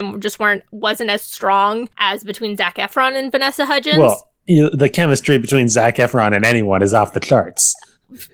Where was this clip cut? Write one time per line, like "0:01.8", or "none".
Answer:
0:01.9

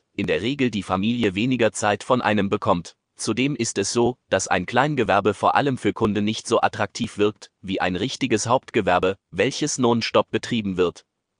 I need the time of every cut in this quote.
0:03.0

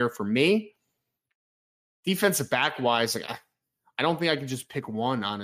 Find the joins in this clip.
0:03.2

